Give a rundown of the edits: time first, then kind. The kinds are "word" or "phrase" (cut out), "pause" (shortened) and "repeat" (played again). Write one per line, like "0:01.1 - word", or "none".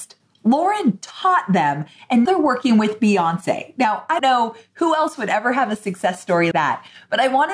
0:02.2 - word
0:04.2 - word
0:06.5 - word